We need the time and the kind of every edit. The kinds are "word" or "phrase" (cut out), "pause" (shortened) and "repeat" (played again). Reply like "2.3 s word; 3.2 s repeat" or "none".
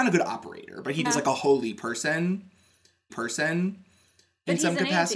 1.0 s word; 3.1 s repeat

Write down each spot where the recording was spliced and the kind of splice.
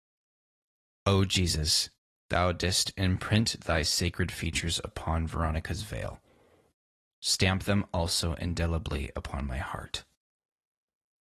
none

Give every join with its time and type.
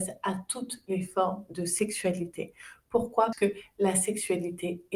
3.3 s word

